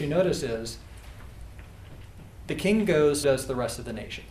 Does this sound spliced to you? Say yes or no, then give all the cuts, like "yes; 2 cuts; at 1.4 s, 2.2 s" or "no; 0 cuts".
yes; 2 cuts; at 2.4 s, 3.2 s